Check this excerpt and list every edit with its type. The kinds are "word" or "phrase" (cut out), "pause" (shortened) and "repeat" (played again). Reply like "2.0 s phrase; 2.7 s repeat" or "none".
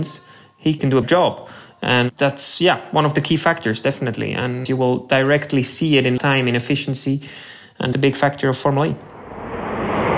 1.0 s word; 6.2 s word; 7.9 s word